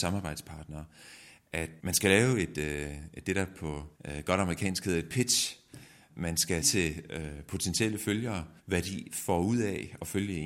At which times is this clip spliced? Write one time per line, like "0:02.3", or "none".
0:01.8
0:03.9
0:06.6
0:08.6